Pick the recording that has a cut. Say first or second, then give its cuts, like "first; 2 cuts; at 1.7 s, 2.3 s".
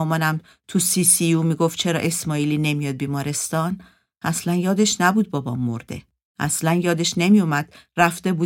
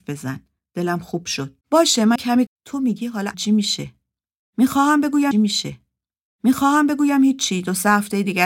second; 5 cuts; at 1.6 s, 2.2 s, 2.5 s, 3.3 s, 5.3 s